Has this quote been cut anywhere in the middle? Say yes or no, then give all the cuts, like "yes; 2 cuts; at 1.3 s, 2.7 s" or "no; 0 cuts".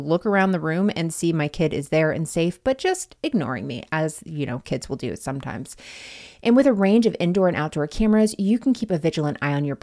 no; 0 cuts